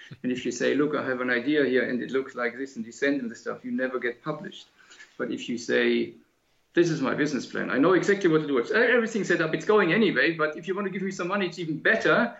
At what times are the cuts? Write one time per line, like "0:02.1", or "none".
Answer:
0:06.7